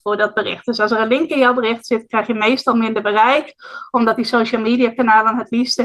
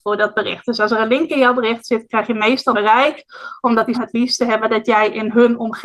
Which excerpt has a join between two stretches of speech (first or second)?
second